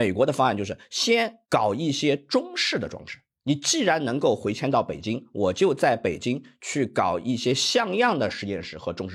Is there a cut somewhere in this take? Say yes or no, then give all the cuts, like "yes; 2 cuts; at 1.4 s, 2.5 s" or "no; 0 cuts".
no; 0 cuts